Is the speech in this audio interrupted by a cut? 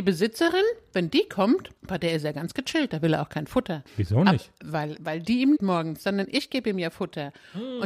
yes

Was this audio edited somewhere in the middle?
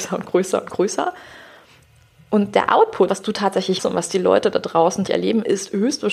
yes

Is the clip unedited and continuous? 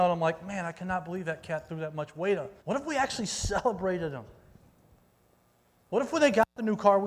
no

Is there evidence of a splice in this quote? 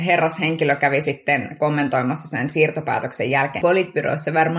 yes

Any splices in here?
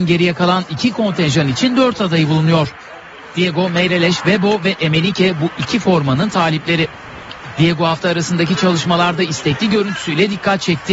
no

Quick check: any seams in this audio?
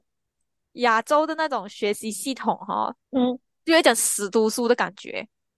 yes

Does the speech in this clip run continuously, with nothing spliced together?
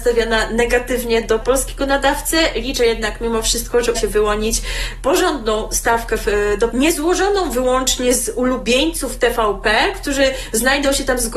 no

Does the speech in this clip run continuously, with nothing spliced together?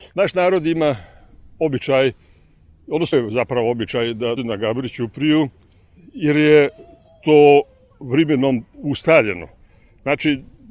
no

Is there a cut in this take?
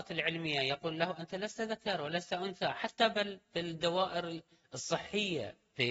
no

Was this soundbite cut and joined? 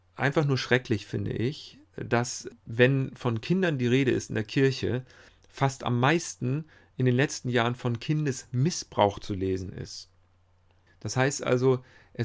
no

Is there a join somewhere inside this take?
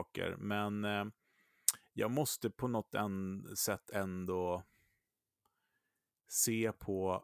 no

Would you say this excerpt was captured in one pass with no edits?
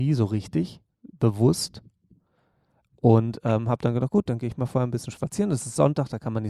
yes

